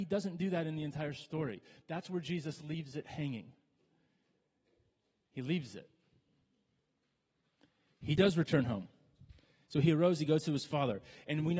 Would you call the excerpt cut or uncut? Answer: uncut